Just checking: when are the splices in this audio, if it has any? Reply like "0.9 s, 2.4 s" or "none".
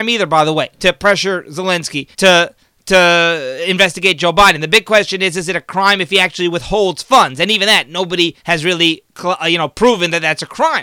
2.1 s, 8.4 s